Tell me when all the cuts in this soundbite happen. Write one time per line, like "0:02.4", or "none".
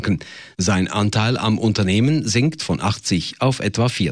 none